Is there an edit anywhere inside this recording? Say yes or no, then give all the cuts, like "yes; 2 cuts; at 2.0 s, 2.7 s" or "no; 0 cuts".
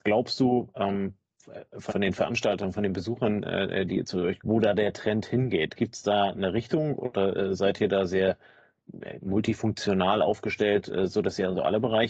yes; 2 cuts; at 1.9 s, 4.4 s